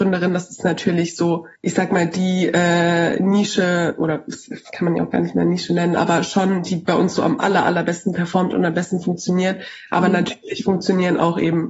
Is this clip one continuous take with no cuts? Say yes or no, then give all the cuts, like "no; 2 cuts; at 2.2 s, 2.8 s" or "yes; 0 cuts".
no; 1 cut; at 1.6 s